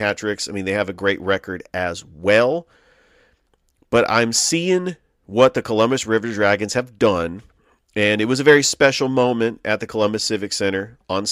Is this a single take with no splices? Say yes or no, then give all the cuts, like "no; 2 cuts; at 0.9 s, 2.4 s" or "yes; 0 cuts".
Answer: yes; 0 cuts